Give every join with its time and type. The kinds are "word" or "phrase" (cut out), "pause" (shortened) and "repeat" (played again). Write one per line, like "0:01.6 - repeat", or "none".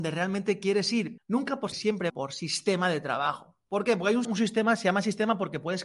0:01.2 - word
0:01.7 - word
0:02.1 - word
0:04.2 - word